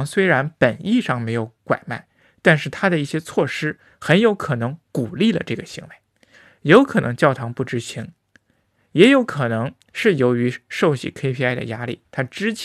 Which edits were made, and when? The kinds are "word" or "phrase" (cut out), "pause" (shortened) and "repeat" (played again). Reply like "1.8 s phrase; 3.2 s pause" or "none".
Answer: none